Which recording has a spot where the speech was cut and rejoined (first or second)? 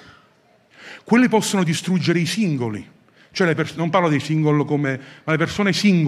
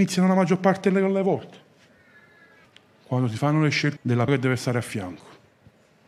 second